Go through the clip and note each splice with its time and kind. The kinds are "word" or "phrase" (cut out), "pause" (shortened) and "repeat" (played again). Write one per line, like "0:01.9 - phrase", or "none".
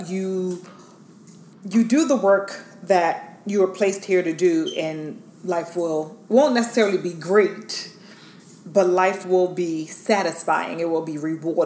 none